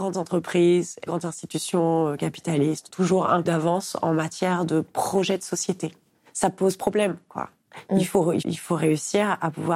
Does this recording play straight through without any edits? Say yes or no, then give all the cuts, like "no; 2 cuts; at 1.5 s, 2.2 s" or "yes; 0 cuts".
no; 4 cuts; at 1.1 s, 2.9 s, 3.5 s, 8.4 s